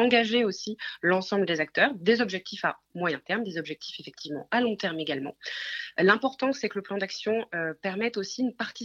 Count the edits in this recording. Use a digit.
0